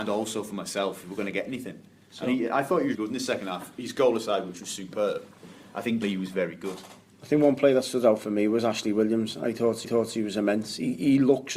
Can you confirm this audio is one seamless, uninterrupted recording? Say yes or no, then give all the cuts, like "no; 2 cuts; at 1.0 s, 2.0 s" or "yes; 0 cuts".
no; 3 cuts; at 2.9 s, 6.0 s, 9.8 s